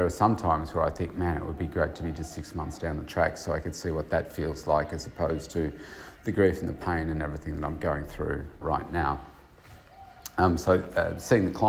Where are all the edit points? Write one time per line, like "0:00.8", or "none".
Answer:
0:08.6